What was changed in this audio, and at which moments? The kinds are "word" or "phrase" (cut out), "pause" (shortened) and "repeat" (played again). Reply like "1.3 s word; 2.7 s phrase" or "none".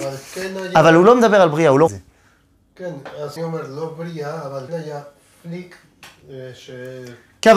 1.9 s phrase; 3.4 s word; 4.7 s word